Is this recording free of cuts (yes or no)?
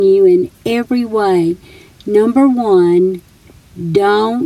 yes